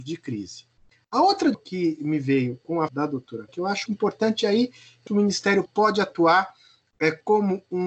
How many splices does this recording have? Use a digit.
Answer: 6